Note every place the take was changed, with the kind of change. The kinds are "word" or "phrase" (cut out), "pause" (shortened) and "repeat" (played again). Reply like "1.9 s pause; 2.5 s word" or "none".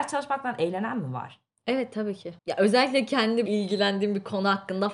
2.4 s pause; 3.5 s word